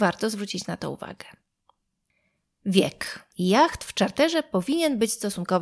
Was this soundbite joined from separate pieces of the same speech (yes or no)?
yes